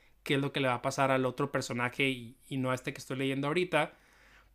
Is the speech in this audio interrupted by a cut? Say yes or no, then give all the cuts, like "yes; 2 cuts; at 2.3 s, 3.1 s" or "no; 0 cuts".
no; 0 cuts